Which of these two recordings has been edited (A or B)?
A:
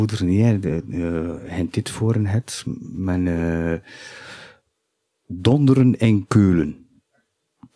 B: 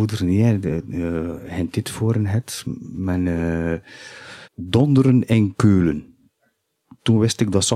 B